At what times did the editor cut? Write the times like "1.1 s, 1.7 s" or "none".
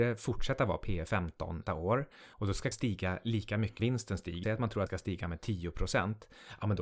1.7 s, 2.7 s, 3.8 s, 4.4 s, 4.9 s